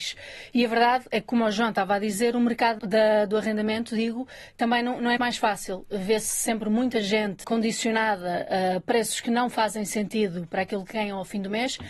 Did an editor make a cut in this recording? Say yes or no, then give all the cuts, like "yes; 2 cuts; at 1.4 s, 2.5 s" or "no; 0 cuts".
yes; 3 cuts; at 2.8 s, 5.2 s, 7.4 s